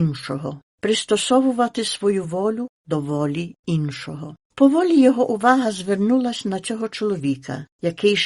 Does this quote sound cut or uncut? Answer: uncut